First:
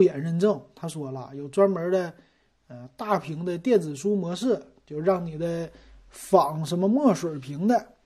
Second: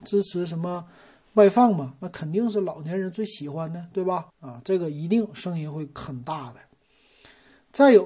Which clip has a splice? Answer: second; 1 cut; at 4.3 s

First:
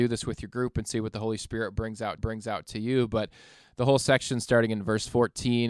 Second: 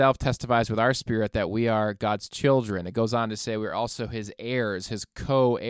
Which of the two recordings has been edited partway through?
first; 1 cut; at 2.2 s

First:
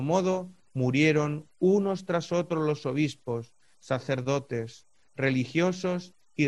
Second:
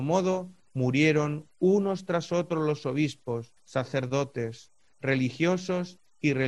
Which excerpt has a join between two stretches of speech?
second; 1 cut; at 3.6 s

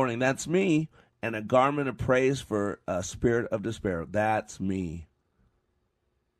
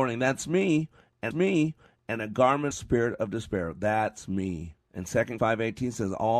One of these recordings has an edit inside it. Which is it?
second; 4 cuts; at 1.3 s, 2.7 s, 4.8 s, 5.4 s

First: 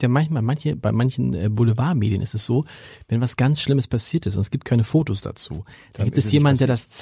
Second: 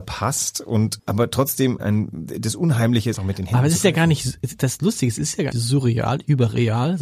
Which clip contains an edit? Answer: second; 4 cuts; at 1.0 s, 1.8 s, 3.2 s, 5.5 s

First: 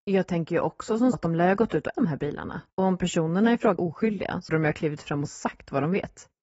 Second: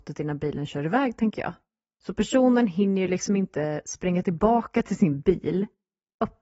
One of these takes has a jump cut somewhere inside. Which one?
first; 5 cuts; at 1.1 s, 1.9 s, 2.7 s, 3.8 s, 4.5 s

